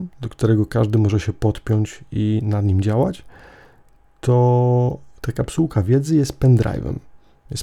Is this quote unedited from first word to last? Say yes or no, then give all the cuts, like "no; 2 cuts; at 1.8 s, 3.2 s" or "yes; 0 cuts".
yes; 0 cuts